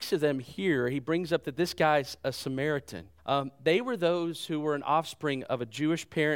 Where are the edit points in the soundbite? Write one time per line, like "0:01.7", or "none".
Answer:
0:03.2